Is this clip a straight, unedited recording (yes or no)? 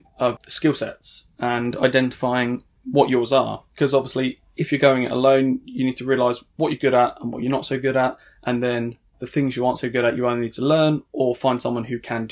yes